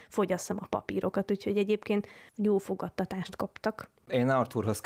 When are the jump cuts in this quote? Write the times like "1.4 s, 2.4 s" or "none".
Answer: none

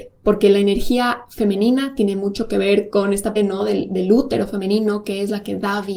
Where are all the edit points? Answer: 3.4 s

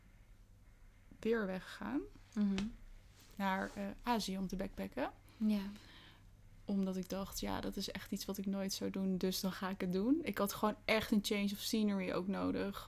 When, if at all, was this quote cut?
none

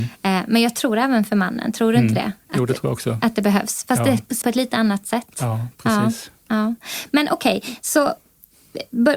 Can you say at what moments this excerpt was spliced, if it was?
4.4 s

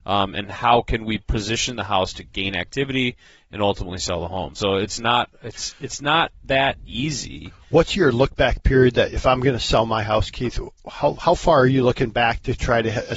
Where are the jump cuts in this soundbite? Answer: none

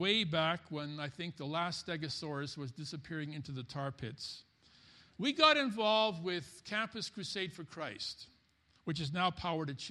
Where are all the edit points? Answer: none

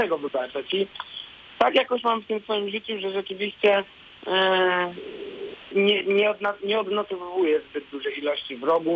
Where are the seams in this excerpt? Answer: 5.7 s

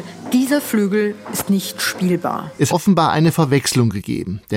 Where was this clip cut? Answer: 2.7 s

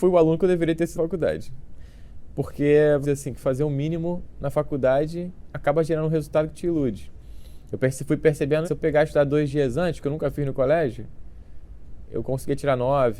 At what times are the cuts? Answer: 0.9 s, 3.0 s, 8.6 s, 10.0 s

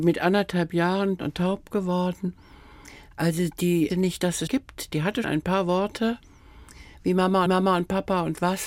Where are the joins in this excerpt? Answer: 1.2 s, 3.9 s, 4.5 s, 5.2 s, 7.5 s

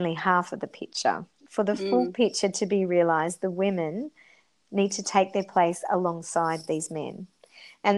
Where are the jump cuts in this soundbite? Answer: none

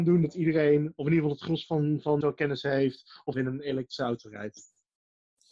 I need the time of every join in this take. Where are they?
2.2 s, 3.3 s

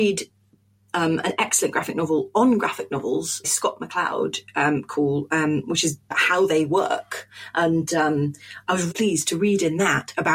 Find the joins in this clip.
3.4 s, 6.1 s, 8.9 s

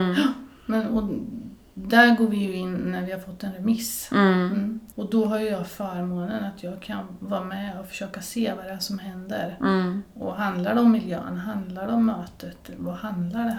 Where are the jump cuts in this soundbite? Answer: 4.9 s

